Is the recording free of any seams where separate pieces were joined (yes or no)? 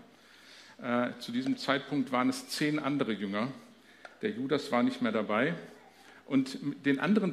yes